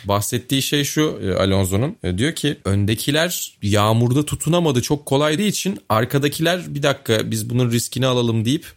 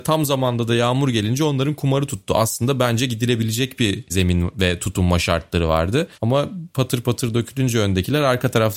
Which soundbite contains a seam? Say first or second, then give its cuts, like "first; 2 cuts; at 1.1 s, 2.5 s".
first; 2 cuts; at 2.6 s, 5.4 s